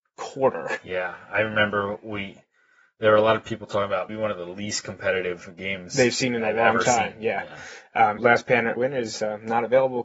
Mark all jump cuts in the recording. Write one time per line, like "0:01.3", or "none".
0:04.1
0:08.2
0:08.8